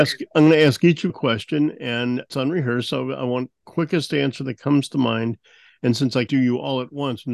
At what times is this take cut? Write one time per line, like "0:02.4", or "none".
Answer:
0:01.1
0:02.3
0:03.6
0:06.3